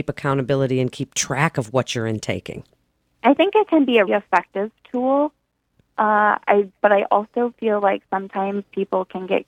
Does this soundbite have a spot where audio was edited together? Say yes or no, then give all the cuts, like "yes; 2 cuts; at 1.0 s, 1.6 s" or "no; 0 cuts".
yes; 1 cut; at 4.1 s